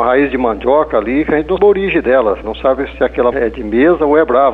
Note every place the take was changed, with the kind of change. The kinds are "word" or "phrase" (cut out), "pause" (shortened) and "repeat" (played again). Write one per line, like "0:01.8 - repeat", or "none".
0:01.6 - word
0:03.3 - word